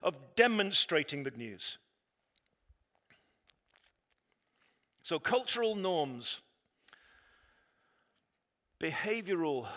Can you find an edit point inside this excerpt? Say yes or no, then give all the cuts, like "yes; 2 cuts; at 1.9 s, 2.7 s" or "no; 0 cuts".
yes; 1 cut; at 1.3 s